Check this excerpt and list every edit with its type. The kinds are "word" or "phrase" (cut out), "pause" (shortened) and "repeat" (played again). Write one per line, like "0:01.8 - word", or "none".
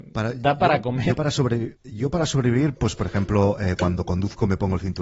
0:01.8 - pause